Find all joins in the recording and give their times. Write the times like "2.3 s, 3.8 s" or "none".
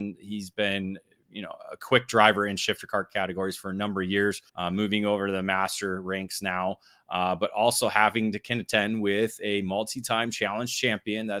4.5 s